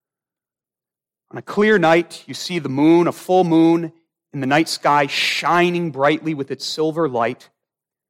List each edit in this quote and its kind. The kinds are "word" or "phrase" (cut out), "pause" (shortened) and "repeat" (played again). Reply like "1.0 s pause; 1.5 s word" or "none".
none